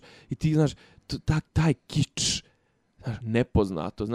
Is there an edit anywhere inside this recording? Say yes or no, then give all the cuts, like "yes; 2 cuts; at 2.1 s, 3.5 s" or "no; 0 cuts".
yes; 2 cuts; at 1.5 s, 3.2 s